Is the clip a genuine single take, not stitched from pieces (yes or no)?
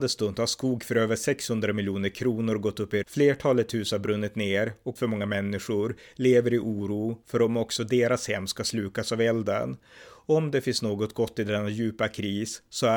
no